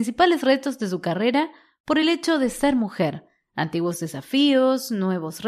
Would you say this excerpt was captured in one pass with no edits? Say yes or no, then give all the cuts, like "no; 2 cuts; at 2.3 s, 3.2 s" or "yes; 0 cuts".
yes; 0 cuts